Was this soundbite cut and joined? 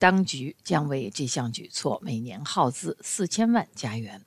no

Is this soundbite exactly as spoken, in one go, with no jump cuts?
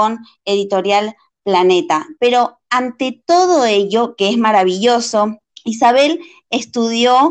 no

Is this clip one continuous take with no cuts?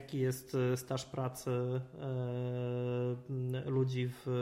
yes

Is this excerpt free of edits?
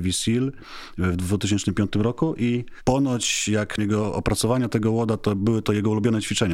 no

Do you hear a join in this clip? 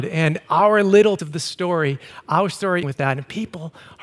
yes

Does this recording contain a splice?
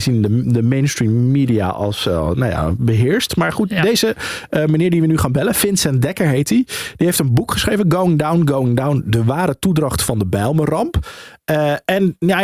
no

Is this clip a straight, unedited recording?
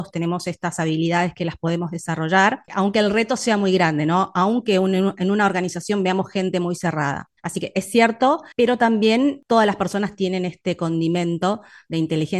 no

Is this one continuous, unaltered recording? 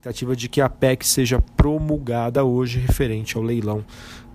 yes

